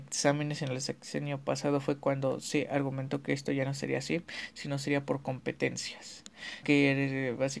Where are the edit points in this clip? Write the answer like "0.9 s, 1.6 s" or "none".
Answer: 6.6 s